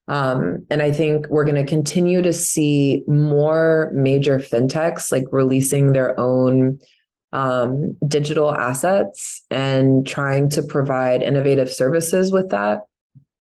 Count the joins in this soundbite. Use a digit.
0